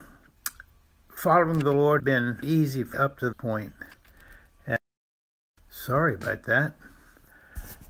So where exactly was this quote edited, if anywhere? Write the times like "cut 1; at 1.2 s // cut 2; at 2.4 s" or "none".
cut 1; at 2.0 s // cut 2; at 2.4 s // cut 3; at 2.9 s // cut 4; at 3.3 s